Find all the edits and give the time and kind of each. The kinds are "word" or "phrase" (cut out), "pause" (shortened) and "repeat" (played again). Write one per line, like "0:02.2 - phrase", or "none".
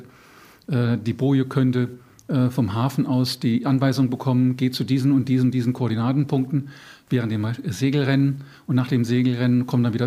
0:02.1 - pause